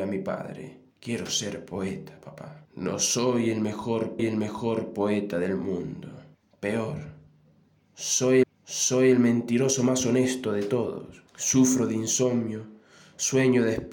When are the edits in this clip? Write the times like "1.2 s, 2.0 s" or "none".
0.9 s, 2.6 s, 4.2 s, 6.3 s, 8.4 s, 11.3 s